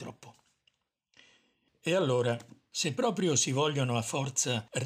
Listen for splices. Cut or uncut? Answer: uncut